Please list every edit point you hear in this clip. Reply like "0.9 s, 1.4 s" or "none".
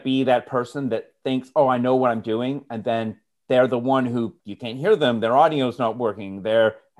4.4 s

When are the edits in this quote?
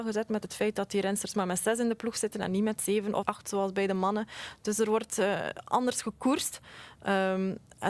3.2 s

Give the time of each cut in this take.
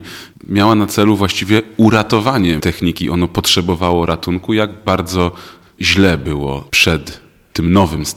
2.6 s

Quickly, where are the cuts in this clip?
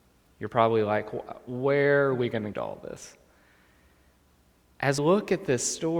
2.5 s, 5.0 s

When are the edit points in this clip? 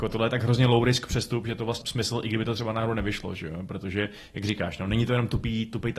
1.8 s

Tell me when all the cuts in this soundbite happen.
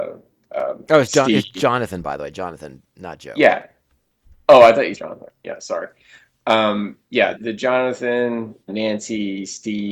5.0 s, 7.4 s, 8.7 s

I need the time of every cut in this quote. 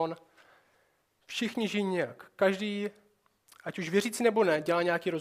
none

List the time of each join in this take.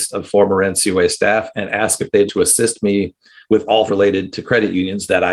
2.3 s, 3.9 s

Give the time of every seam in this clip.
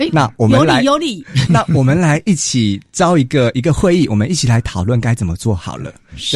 1.5 s

